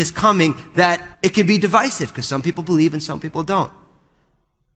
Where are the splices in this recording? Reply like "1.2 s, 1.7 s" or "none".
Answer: 1.1 s

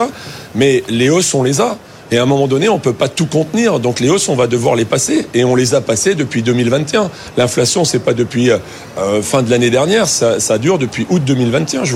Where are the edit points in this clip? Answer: none

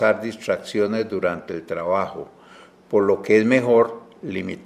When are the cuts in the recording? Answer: none

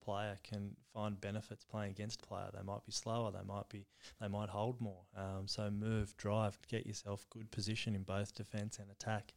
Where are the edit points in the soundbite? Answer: 2.2 s, 6.6 s

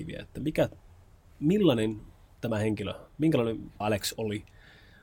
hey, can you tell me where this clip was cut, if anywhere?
3.8 s

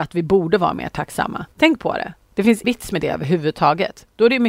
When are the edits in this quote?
1.5 s, 2.6 s

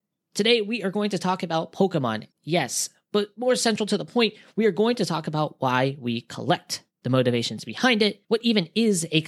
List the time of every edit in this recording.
2.3 s, 8.2 s

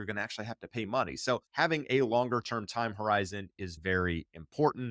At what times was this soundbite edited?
1.5 s

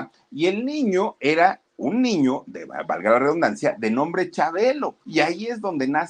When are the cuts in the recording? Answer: 1.7 s, 5.0 s

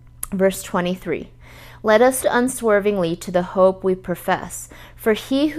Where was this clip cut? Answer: 2.2 s

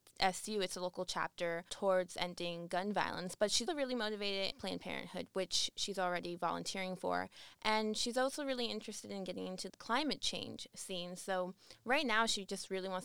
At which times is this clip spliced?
3.7 s, 4.5 s, 9.7 s

